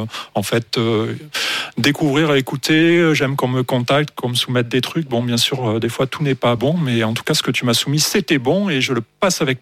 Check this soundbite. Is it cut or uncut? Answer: uncut